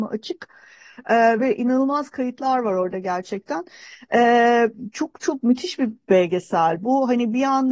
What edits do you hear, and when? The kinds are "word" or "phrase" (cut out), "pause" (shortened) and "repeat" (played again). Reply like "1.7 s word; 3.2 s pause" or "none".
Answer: none